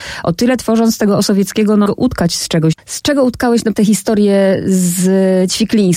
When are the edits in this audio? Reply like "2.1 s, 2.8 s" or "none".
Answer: 1.9 s, 3.7 s